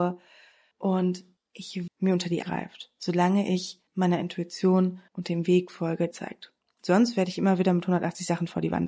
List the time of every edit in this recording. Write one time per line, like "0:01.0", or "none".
0:01.9
0:02.4
0:03.9
0:05.1
0:06.1